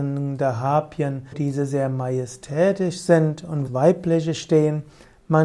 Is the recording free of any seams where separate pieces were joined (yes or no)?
no